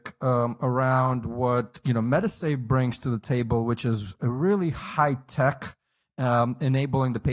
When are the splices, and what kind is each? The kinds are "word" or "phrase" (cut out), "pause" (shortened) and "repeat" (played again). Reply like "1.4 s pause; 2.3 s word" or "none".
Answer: none